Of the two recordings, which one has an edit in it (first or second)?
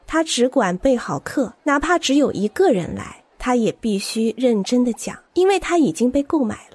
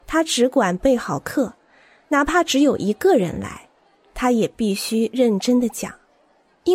first